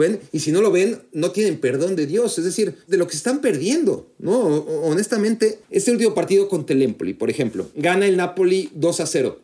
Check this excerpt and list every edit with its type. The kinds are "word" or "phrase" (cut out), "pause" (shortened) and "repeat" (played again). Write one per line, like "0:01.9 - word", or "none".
0:02.8 - pause
0:05.6 - pause